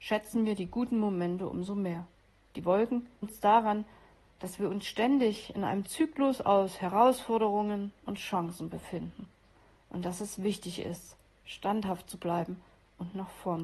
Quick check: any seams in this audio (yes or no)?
yes